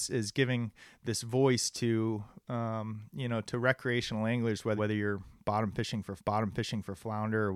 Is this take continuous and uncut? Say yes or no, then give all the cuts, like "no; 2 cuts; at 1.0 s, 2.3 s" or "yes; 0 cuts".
no; 2 cuts; at 4.8 s, 6.2 s